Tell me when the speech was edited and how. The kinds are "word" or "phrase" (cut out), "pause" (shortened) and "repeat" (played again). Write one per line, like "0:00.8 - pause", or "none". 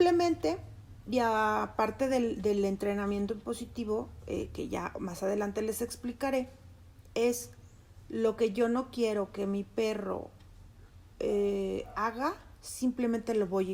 none